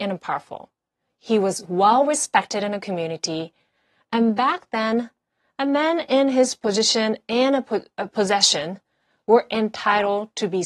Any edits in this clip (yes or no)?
no